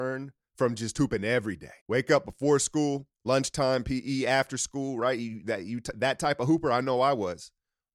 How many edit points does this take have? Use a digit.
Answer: 2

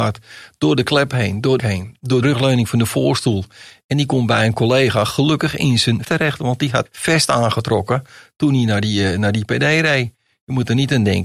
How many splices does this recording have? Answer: 4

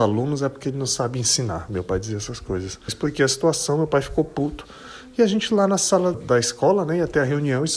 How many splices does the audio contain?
2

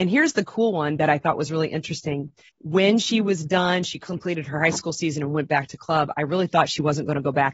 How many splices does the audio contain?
1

